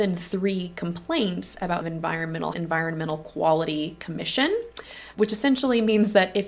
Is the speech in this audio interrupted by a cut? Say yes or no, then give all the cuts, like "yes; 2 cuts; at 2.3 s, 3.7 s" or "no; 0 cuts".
yes; 3 cuts; at 1.8 s, 2.5 s, 5.1 s